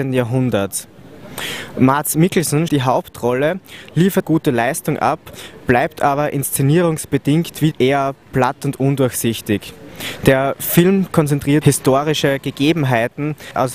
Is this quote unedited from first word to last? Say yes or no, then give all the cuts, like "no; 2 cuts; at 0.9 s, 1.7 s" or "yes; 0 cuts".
no; 5 cuts; at 2.7 s, 4.2 s, 7.7 s, 8.2 s, 11.6 s